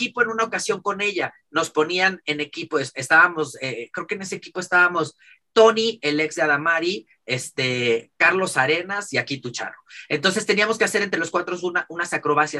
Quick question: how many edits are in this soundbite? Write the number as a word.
zero